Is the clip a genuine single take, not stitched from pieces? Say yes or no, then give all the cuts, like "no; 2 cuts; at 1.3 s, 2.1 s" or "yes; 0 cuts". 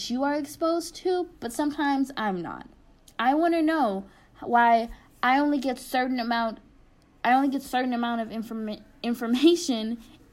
yes; 0 cuts